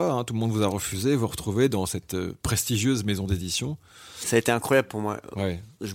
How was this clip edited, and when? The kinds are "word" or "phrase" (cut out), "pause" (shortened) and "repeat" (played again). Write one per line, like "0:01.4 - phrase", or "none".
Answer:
none